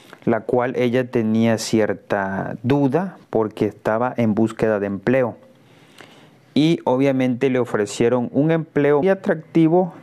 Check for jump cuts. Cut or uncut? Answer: cut